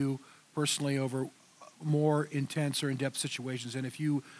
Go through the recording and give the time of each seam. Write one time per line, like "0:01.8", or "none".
none

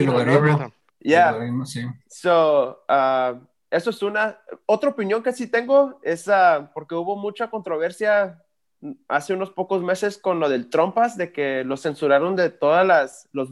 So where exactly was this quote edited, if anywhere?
none

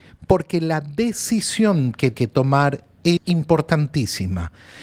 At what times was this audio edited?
0:02.1
0:03.2

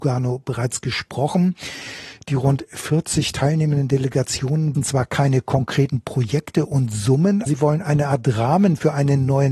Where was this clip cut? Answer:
0:04.7
0:07.5

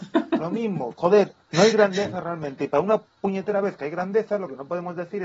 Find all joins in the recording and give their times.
0:01.4

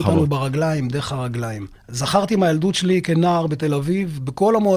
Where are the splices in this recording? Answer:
0:01.8

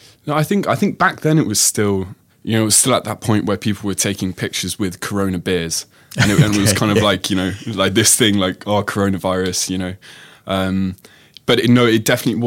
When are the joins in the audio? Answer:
0:02.3

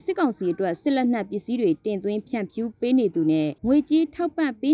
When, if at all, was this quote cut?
0:03.6

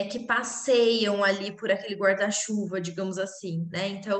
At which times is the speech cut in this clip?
none

